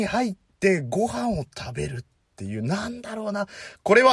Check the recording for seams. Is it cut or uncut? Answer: uncut